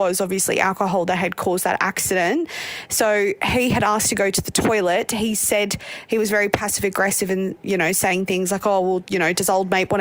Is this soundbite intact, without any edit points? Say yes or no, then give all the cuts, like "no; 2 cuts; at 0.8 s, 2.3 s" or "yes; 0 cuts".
yes; 0 cuts